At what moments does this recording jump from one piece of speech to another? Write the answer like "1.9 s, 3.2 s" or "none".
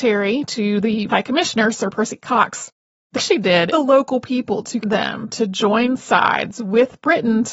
1.1 s, 3.1 s, 3.7 s, 4.8 s